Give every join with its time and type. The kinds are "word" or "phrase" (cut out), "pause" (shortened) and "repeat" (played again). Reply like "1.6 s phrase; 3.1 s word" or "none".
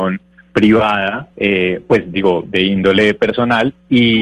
1.3 s pause; 2.4 s word

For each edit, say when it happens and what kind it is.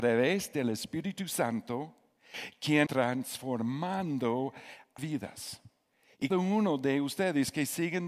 2.9 s word; 5.0 s word; 6.3 s word

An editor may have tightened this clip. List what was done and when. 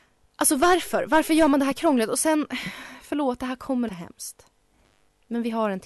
3.9 s word

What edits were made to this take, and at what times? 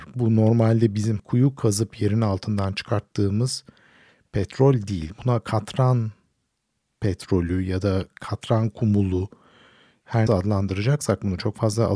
1.2 s word; 10.3 s word

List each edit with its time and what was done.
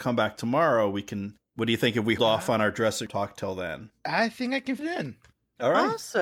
2.2 s word; 3.1 s word; 4.8 s word

